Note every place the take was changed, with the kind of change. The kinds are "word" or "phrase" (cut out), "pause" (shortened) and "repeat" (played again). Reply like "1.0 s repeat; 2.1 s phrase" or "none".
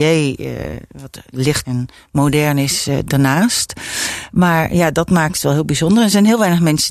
1.6 s word; 3.1 s word